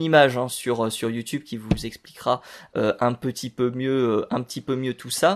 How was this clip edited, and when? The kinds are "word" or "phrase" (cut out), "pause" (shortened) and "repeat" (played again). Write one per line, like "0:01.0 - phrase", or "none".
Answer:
none